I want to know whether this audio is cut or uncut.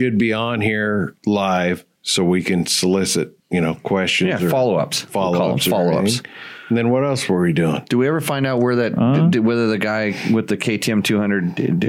cut